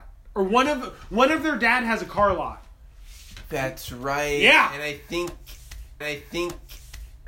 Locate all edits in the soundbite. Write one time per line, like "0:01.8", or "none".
0:06.0

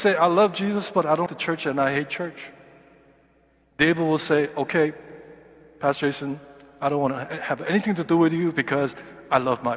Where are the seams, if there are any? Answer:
0:01.3

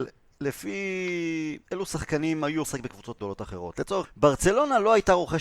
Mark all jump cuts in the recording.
0:01.6
0:02.6
0:03.2
0:04.0

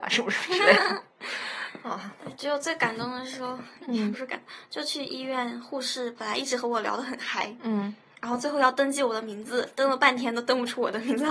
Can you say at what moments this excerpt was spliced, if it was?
none

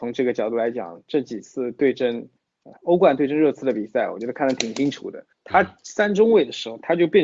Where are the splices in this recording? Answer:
0:02.8
0:05.3

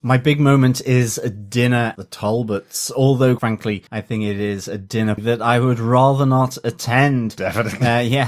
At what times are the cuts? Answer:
0:02.0
0:03.4
0:03.9
0:05.2

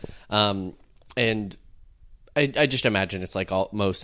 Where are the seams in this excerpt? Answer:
none

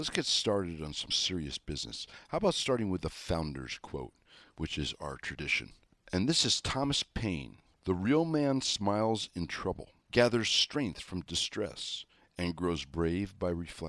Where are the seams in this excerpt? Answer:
none

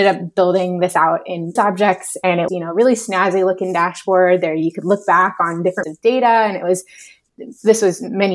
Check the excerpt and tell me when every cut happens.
0:01.6
0:02.5
0:05.8

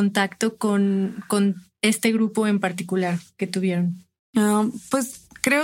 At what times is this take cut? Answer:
none

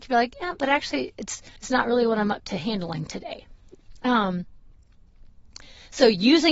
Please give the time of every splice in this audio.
0:01.6

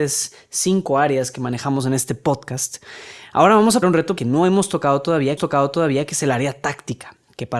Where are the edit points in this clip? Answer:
0:03.8
0:04.2
0:05.4

